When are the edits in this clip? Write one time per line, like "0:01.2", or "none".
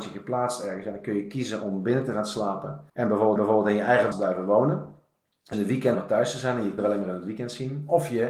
0:02.9
0:03.4
0:04.1
0:05.5
0:05.9
0:06.8